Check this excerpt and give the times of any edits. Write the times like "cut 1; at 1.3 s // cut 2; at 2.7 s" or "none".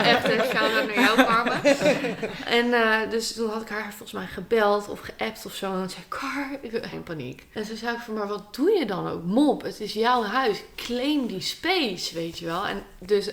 cut 1; at 6.9 s